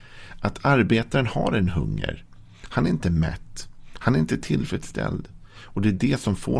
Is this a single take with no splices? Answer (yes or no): yes